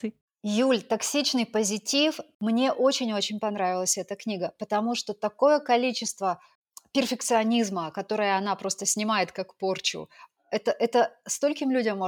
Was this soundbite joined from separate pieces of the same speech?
no; 0 cuts

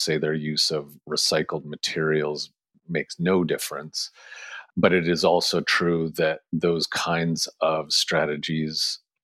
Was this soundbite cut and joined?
no; 0 cuts

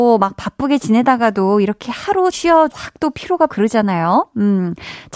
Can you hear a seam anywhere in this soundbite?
yes; 3 cuts; at 2.3 s, 2.7 s, 3.5 s

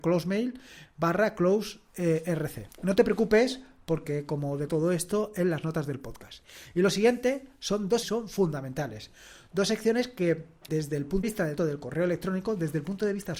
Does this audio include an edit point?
yes; 6 cuts; at 2.7 s, 4.7 s, 8.0 s, 10.7 s, 11.2 s, 11.6 s

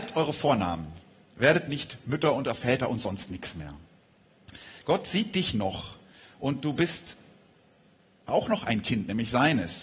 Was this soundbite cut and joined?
no; 0 cuts

